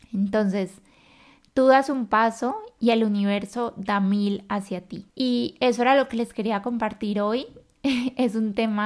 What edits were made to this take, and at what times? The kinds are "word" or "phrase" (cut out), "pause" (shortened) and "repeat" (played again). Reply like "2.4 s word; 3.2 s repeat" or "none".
5.1 s pause

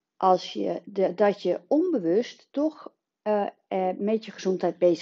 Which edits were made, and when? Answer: none

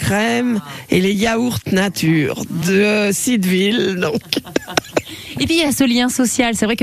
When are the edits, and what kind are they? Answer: none

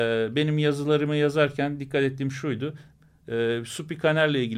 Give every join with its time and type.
none

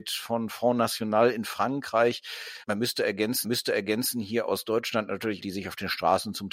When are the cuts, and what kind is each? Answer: 2.6 s pause; 3.4 s repeat; 5.4 s phrase

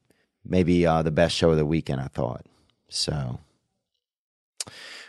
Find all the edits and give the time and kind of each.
none

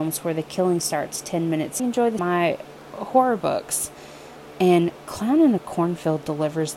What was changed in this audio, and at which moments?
1.8 s phrase; 2.2 s phrase

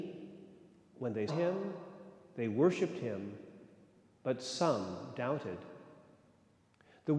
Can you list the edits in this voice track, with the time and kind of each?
1.3 s word

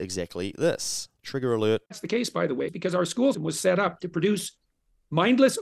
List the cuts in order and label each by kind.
1.2 s pause; 1.9 s pause; 2.7 s word; 3.3 s word

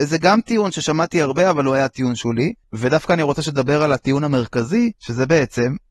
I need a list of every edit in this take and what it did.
2.6 s pause; 4.9 s pause

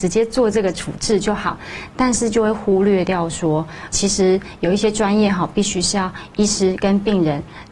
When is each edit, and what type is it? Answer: 3.9 s word

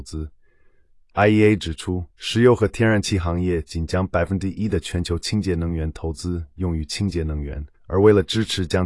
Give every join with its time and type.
2.1 s pause; 7.7 s pause

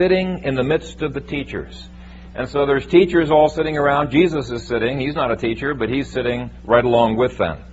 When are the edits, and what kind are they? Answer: none

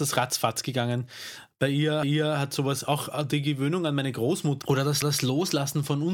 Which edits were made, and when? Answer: 2.0 s repeat; 4.6 s phrase; 5.0 s repeat

